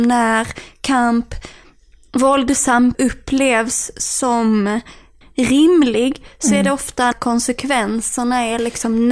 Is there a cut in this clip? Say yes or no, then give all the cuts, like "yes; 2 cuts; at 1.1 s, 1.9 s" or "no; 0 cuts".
yes; 3 cuts; at 2.9 s, 5.2 s, 7.1 s